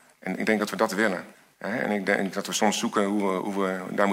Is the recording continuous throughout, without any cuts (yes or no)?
no